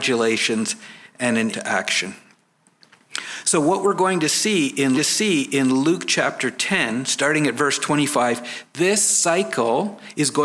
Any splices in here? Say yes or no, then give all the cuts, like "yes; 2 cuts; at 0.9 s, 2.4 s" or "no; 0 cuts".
yes; 2 cuts; at 1.5 s, 4.9 s